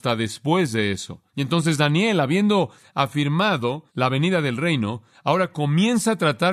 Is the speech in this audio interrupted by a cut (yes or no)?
yes